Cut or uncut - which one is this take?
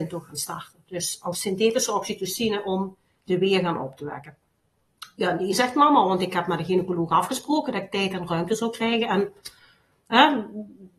uncut